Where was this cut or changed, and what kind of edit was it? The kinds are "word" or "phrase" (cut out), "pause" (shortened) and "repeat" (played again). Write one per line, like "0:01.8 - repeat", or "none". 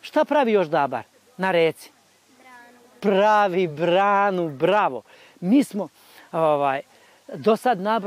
none